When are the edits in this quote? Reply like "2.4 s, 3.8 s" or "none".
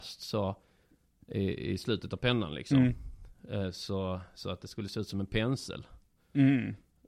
none